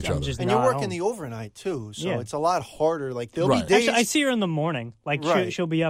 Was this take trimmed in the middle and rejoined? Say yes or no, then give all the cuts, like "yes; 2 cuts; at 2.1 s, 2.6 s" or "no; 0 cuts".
no; 0 cuts